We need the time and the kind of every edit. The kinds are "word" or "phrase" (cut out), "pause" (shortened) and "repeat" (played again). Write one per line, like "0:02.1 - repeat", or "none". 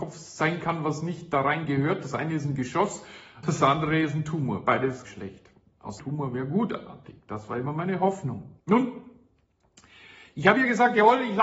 0:03.4 - word
0:05.0 - word
0:06.0 - phrase
0:08.6 - pause